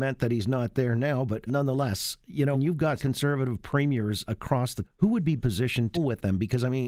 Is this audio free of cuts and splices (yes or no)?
no